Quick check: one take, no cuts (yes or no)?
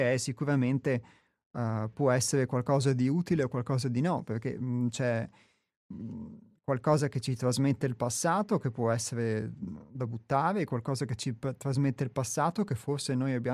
yes